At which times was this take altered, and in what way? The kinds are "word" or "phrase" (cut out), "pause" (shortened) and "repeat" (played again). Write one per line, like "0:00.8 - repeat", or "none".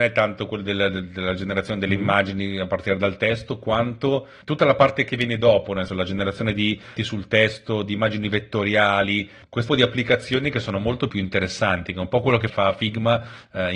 0:05.9 - word
0:07.0 - phrase
0:09.7 - word
0:11.1 - word
0:12.5 - word